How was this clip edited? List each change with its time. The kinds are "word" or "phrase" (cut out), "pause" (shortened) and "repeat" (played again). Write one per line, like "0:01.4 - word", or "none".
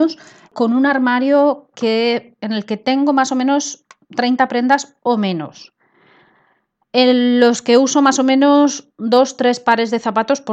none